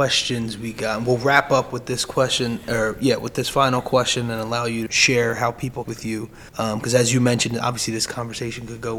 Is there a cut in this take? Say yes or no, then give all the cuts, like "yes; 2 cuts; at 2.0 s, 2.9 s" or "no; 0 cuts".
yes; 3 cuts; at 4.9 s, 5.8 s, 6.5 s